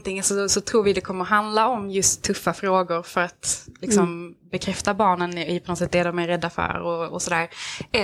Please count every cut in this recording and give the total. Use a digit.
0